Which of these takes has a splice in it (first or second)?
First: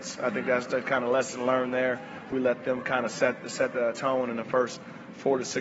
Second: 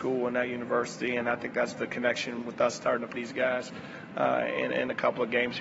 second